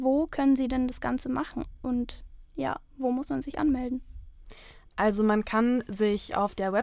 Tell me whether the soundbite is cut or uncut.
uncut